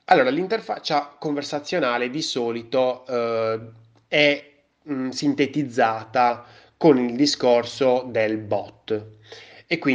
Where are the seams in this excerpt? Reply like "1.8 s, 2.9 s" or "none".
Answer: none

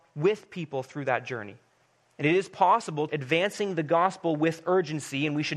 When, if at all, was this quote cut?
1.9 s, 3.1 s

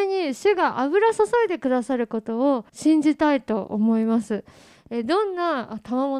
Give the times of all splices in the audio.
2.7 s

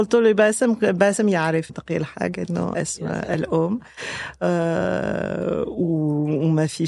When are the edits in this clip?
1.7 s, 2.7 s

